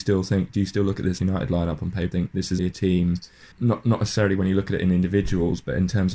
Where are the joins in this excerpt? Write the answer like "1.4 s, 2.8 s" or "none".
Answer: 1.2 s, 2.1 s, 2.6 s, 3.5 s